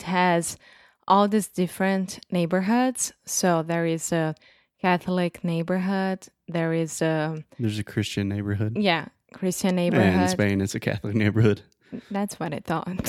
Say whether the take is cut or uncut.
uncut